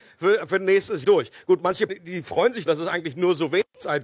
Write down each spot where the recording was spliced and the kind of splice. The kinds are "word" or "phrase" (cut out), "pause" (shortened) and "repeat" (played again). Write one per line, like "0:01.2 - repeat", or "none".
0:01.0 - word
0:01.9 - word
0:02.7 - word